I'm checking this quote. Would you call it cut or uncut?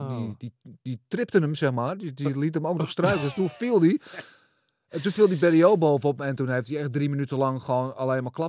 uncut